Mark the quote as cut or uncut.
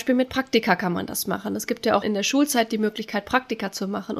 cut